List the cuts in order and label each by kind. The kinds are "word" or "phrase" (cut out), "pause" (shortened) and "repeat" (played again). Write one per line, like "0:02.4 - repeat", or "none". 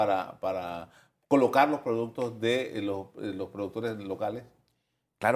none